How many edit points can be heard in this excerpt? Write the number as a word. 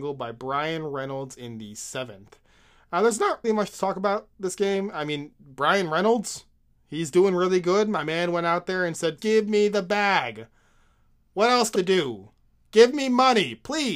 three